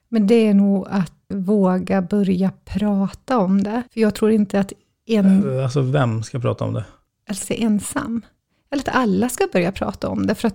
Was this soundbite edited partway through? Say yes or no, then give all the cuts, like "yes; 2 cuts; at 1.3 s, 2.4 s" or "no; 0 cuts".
yes; 3 cuts; at 1.3 s, 3.9 s, 7.4 s